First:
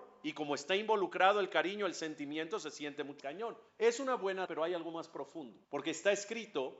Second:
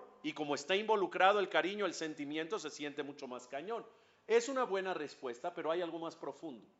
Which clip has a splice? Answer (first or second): first